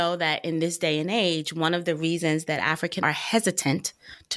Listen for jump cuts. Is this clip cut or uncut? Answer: cut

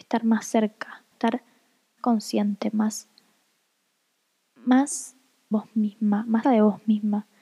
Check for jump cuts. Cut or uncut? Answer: cut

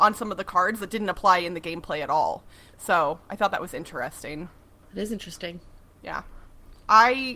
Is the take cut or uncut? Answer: uncut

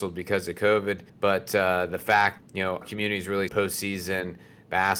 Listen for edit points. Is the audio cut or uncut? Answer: cut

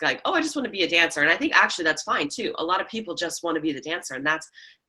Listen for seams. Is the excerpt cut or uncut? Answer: uncut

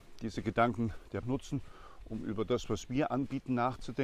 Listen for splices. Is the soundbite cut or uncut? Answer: cut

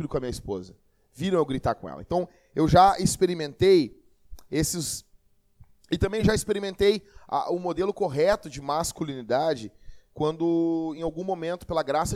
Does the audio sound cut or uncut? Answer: uncut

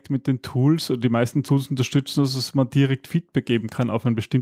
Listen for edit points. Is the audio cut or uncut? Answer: uncut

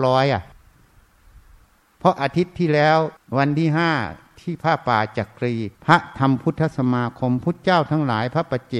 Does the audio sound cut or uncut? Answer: cut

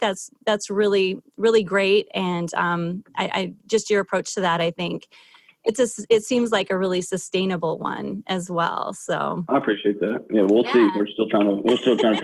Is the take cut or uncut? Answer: uncut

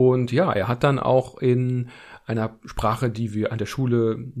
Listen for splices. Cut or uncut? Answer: uncut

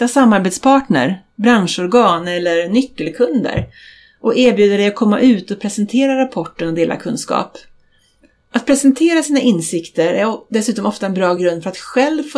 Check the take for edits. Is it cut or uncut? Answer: uncut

